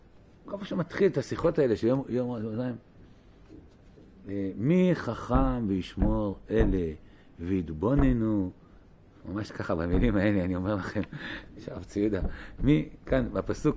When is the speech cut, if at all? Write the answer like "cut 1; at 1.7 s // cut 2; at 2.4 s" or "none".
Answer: none